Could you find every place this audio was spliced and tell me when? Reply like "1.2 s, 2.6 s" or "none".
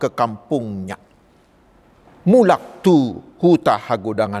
none